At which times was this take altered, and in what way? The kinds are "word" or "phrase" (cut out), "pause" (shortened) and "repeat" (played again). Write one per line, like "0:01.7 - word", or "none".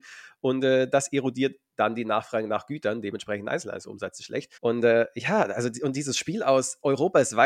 0:04.6 - pause